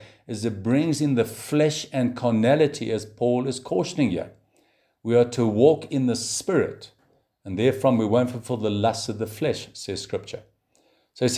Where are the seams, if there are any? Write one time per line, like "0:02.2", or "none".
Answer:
none

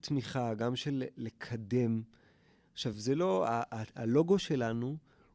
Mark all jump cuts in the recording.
none

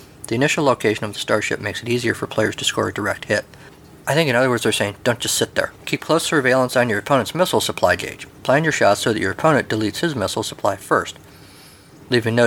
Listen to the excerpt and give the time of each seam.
0:05.7

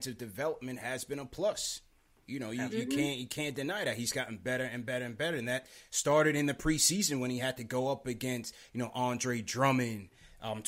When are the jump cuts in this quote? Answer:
none

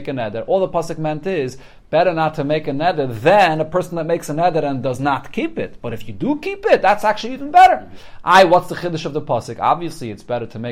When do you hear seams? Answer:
none

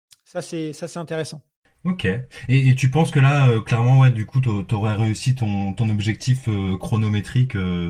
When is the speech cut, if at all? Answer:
none

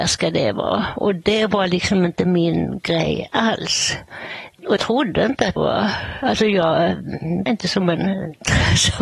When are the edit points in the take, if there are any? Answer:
0:04.8
0:05.6
0:07.5

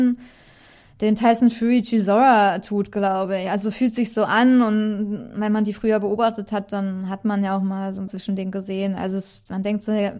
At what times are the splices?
0:08.1

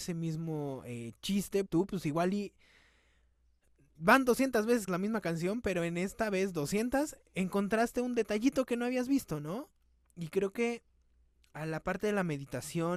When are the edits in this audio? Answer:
0:01.7
0:04.9
0:07.3

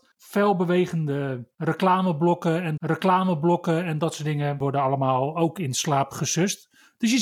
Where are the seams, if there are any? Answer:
0:02.8

